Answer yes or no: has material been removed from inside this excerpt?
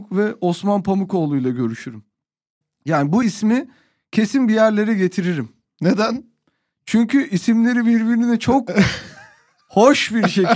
yes